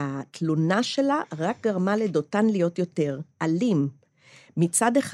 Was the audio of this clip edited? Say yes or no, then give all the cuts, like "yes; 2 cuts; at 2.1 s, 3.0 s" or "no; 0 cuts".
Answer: yes; 1 cut; at 3.3 s